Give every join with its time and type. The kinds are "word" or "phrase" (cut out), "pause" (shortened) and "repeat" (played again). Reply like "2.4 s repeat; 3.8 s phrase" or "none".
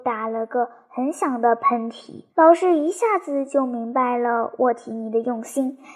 2.3 s pause